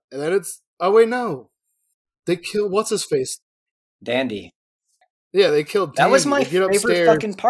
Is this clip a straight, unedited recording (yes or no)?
yes